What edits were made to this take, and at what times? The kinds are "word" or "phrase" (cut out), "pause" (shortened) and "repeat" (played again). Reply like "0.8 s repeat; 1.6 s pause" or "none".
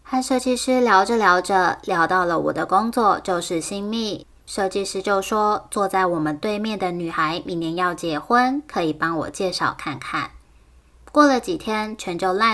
4.4 s pause